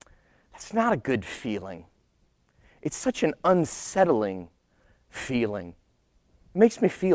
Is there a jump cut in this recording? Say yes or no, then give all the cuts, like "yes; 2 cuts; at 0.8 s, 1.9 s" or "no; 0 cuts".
no; 0 cuts